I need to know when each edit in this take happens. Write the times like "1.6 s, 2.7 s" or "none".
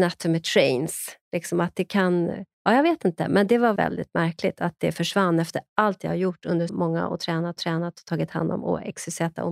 2.5 s, 3.8 s, 6.7 s, 7.6 s